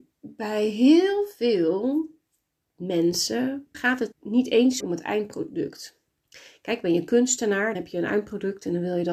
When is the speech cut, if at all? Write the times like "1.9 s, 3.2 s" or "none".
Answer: 3.7 s, 4.1 s, 4.8 s, 7.7 s